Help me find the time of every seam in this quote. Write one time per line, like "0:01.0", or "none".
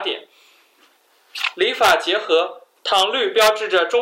0:02.8